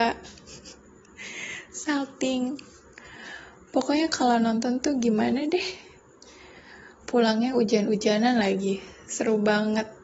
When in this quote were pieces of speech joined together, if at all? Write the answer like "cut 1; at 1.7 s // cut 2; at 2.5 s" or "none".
none